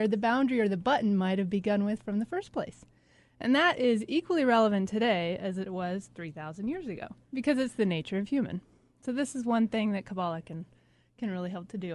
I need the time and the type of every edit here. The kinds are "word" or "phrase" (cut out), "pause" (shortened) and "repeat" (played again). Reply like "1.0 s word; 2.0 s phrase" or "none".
none